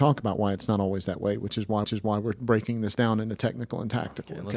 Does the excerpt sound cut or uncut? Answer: cut